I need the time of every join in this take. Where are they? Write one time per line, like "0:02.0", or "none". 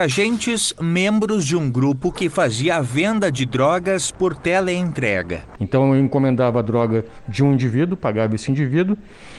none

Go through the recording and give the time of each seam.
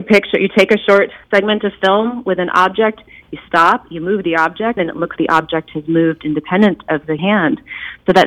0:01.2
0:04.8
0:05.2
0:07.2

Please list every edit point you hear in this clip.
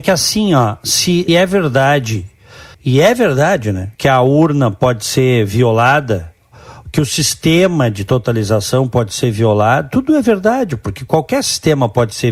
0:01.3
0:02.7
0:03.9

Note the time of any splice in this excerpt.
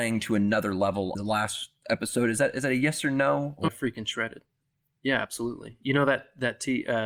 0:01.1
0:03.7

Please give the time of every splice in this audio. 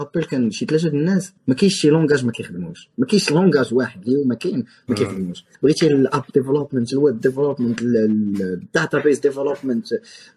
0:01.4
0:05.5

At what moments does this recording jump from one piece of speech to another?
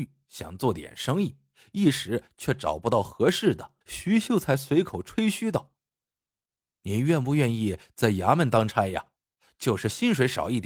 0:03.8

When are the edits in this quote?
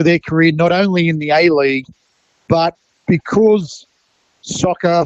none

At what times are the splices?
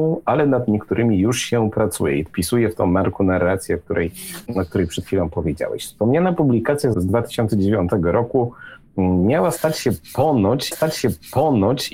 0:02.3
0:04.5
0:06.9
0:10.7

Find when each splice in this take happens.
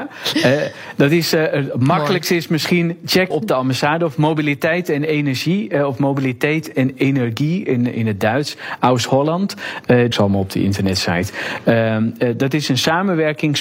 0:03.3
0:10.1

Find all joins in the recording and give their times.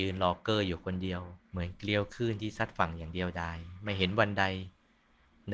0:01.4

